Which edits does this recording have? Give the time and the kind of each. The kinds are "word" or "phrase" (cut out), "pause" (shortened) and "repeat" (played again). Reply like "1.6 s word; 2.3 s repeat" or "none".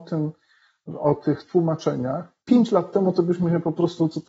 2.4 s pause